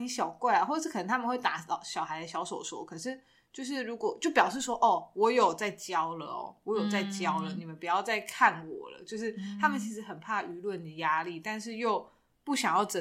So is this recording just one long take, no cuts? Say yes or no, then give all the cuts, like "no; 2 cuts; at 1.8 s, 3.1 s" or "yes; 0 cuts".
yes; 0 cuts